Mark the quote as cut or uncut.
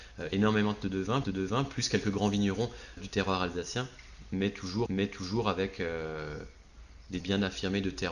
cut